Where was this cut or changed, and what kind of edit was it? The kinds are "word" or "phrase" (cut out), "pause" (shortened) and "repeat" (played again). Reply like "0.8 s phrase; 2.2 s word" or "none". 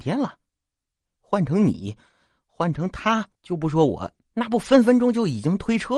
3.3 s pause; 4.2 s pause

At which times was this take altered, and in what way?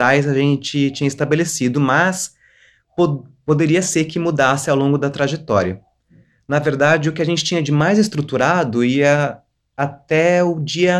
none

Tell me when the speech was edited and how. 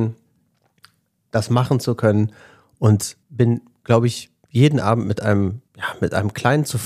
3.2 s pause; 5.7 s pause

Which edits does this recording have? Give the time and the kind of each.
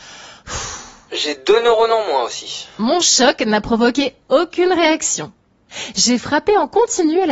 none

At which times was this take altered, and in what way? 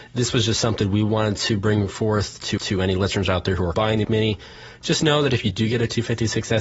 2.6 s repeat; 3.7 s word; 4.0 s word

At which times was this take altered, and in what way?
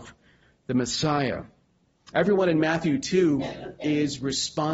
none

